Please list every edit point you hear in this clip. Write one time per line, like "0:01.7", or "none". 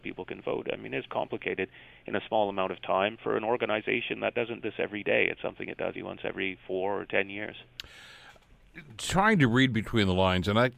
0:01.1
0:04.6
0:05.9